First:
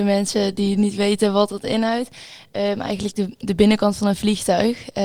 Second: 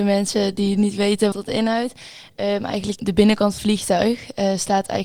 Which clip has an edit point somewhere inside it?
second; 3 cuts; at 1.3 s, 3.0 s, 3.6 s

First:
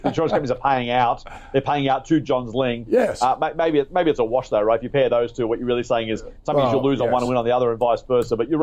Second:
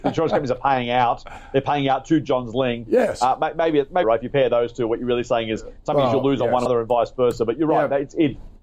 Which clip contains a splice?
second; 2 cuts; at 4.0 s, 6.7 s

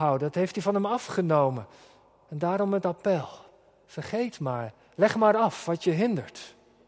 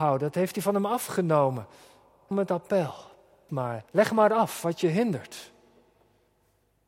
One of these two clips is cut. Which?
second; 3 cuts; at 2.3 s, 3.5 s, 3.9 s

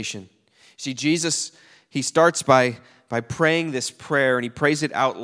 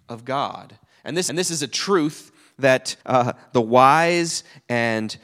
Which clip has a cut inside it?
second; 2 cuts; at 1.3 s, 3.0 s

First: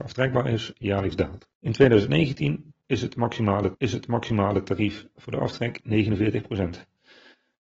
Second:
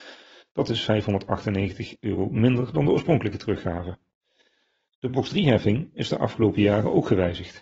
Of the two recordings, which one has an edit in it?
first; 2 cuts; at 1.5 s, 3.7 s

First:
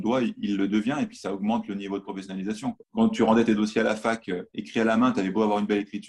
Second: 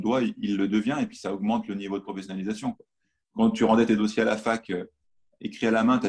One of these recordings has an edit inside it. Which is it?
first; 2 cuts; at 2.8 s, 4.5 s

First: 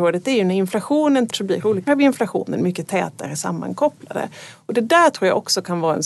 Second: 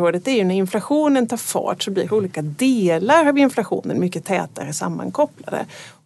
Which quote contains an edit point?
first; 2 cuts; at 1.3 s, 1.9 s

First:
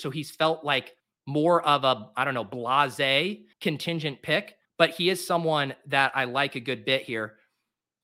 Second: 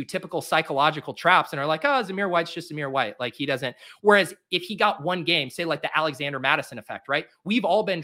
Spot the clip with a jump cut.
first; 3 cuts; at 1.0 s, 3.5 s, 4.6 s

